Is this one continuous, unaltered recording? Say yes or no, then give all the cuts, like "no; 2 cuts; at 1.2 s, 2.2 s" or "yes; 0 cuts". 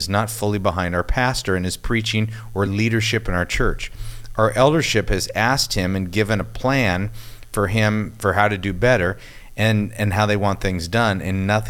yes; 0 cuts